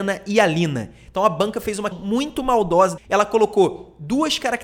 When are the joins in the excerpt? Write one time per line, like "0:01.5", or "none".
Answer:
0:01.9
0:03.0

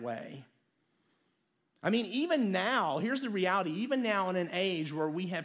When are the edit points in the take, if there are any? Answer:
none

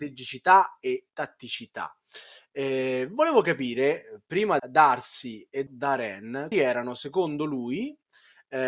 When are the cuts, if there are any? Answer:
0:01.1
0:04.6
0:05.7
0:06.5

